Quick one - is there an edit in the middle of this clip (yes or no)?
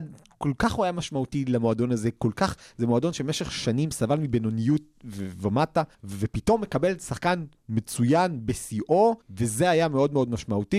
yes